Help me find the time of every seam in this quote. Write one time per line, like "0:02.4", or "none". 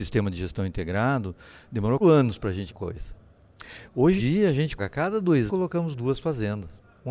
0:02.0
0:02.7
0:04.2
0:04.8
0:05.5